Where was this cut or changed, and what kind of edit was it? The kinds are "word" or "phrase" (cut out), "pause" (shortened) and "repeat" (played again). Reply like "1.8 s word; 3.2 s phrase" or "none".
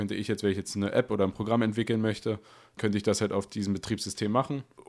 2.8 s word